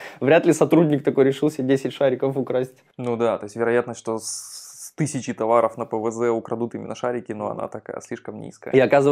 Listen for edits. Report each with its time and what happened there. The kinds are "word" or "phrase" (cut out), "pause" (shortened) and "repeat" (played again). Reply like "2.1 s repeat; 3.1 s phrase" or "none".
none